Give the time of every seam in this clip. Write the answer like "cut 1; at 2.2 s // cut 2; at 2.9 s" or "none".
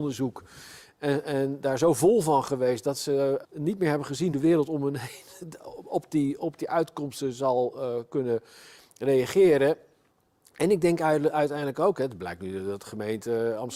cut 1; at 3.4 s // cut 2; at 4.3 s